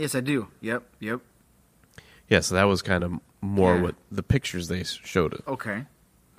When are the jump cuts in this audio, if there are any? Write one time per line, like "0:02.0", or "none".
none